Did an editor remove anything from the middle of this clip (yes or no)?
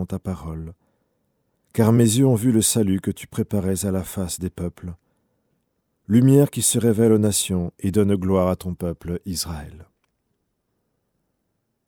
no